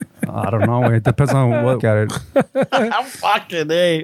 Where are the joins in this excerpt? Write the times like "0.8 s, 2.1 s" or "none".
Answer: 1.8 s